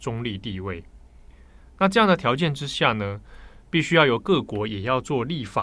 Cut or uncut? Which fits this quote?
uncut